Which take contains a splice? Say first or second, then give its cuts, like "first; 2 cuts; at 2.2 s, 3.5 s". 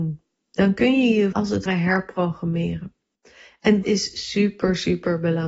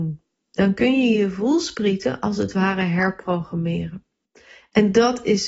first; 3 cuts; at 1.3 s, 1.7 s, 3.8 s